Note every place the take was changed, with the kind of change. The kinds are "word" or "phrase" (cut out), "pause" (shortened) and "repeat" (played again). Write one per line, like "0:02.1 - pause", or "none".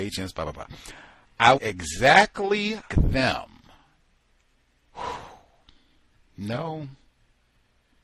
0:01.6 - word
0:02.9 - word

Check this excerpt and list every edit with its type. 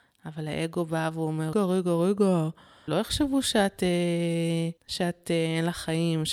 0:01.5 - word
0:02.9 - word
0:04.8 - pause

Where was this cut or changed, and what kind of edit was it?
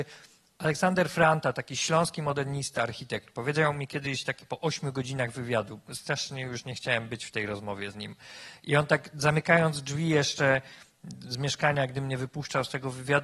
none

